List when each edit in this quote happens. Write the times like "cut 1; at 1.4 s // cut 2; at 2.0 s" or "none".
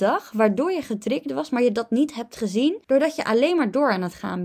cut 1; at 2.8 s